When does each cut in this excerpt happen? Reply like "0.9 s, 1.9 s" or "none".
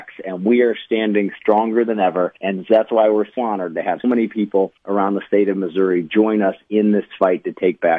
2.4 s, 3.4 s, 4.0 s, 4.8 s